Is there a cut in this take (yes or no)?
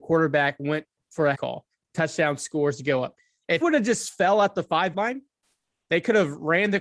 yes